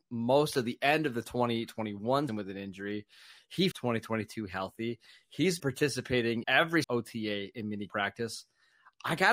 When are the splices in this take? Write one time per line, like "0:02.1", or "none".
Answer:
0:02.3
0:03.7
0:05.6
0:06.4
0:06.8
0:07.9